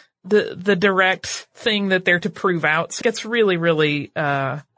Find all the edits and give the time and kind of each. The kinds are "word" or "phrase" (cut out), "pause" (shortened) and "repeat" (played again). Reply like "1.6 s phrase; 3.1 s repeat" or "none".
2.2 s word; 3.0 s word